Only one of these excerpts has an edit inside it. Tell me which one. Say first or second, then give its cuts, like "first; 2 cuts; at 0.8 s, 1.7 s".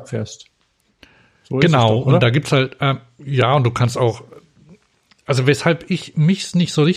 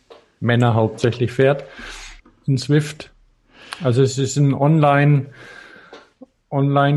second; 1 cut; at 2.2 s